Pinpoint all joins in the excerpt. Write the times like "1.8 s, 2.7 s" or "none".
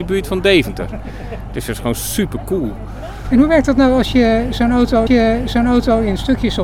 5.1 s

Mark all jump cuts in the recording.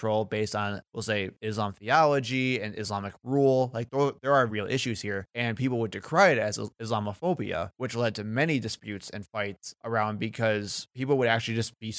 4.5 s

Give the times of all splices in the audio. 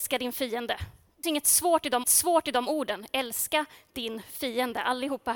1.2 s, 2.0 s

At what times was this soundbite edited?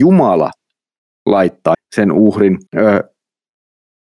1.7 s, 2.7 s

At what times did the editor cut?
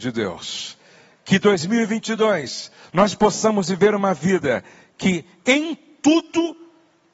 none

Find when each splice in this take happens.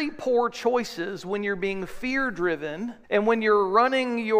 3.0 s

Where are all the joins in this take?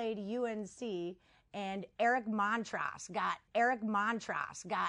3.5 s

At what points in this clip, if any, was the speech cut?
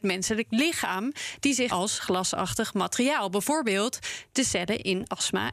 1.7 s

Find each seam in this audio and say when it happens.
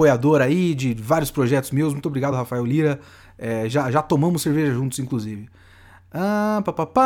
none

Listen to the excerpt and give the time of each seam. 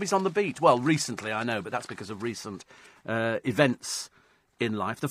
none

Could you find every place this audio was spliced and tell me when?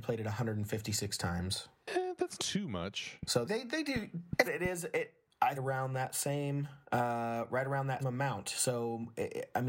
2.4 s, 3.4 s, 4.4 s, 5.5 s, 6.8 s, 8.0 s

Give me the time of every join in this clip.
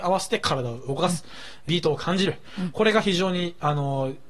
1.7 s

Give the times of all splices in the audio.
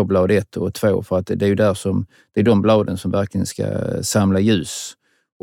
none

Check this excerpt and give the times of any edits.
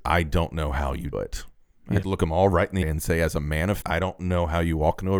1.1 s, 2.0 s, 2.8 s, 3.8 s

